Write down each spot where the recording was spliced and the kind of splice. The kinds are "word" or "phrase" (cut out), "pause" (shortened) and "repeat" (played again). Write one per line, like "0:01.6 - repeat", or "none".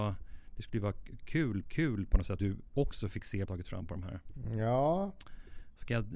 0:01.6 - repeat
0:02.4 - word
0:03.4 - phrase